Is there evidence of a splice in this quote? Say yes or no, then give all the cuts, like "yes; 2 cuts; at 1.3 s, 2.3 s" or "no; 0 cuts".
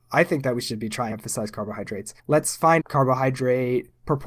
yes; 3 cuts; at 1.1 s, 2.2 s, 2.8 s